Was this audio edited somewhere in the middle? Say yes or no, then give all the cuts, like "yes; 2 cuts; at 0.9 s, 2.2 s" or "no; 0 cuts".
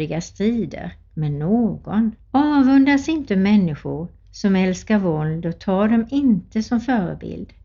yes; 1 cut; at 2.2 s